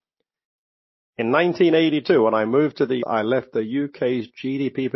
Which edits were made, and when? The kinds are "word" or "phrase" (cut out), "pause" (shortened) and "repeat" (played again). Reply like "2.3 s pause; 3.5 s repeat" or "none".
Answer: 3.0 s word

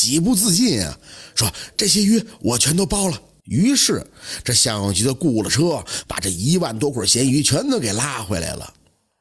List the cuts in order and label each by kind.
3.4 s pause

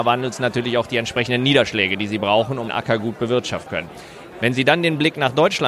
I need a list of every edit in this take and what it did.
2.7 s word; 3.7 s word

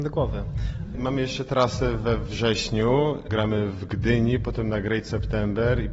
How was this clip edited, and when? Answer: none

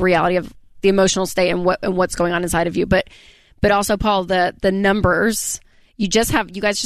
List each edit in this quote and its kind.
none

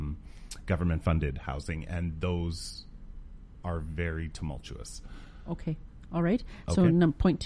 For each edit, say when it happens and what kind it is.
none

